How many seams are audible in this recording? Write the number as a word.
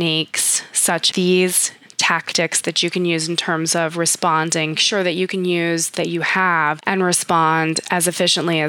three